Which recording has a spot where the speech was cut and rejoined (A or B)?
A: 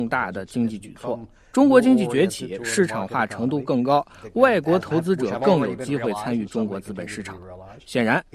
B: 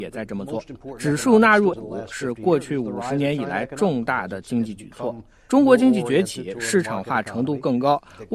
B